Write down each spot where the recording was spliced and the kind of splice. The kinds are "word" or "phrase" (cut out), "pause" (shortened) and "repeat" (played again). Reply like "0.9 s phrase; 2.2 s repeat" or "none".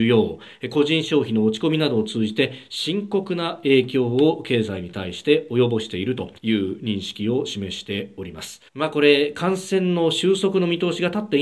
6.4 s pause; 8.7 s pause